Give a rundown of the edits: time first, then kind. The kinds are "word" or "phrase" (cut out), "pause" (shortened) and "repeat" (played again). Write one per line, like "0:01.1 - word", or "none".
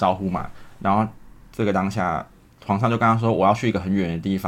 0:02.5 - pause